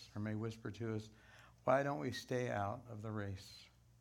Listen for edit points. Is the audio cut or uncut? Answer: uncut